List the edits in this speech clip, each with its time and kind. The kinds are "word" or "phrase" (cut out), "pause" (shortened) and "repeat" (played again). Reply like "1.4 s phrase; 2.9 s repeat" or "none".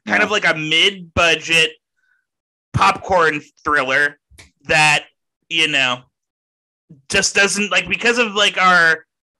none

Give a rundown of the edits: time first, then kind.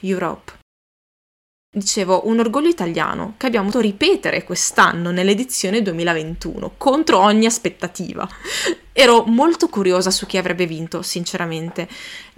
3.7 s word

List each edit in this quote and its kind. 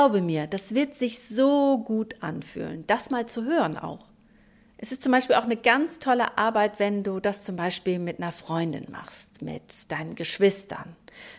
none

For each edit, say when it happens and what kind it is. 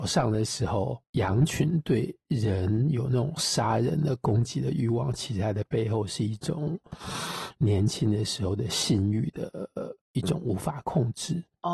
10.0 s pause

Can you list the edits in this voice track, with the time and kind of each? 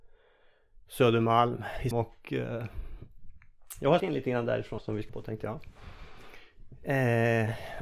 1.9 s word; 4.0 s word; 4.8 s word; 5.1 s word

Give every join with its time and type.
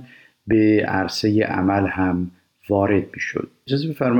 none

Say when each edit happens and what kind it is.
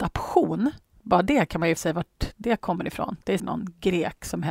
1.8 s word; 3.4 s word

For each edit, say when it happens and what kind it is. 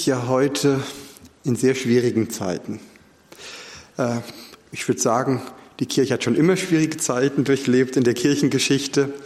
none

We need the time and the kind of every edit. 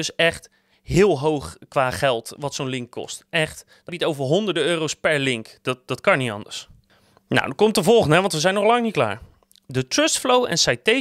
3.9 s word

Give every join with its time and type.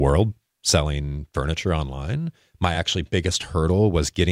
none

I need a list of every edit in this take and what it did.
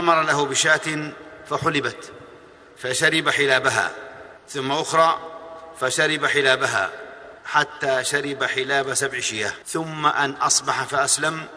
4.4 s pause; 7.4 s pause; 9.6 s pause

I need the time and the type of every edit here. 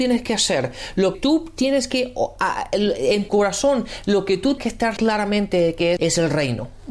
1.1 s word; 3.3 s word; 4.6 s word; 5.0 s phrase; 6.0 s word

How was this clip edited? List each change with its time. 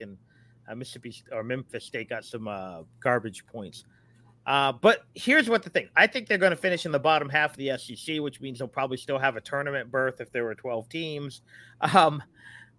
none

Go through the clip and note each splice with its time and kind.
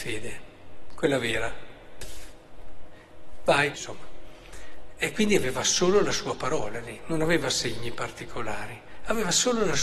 3.7 s phrase

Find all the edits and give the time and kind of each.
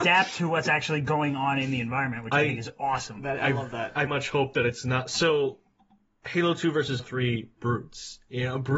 4.1 s word; 7.0 s word

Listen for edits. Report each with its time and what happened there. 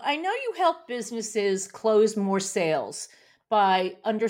none

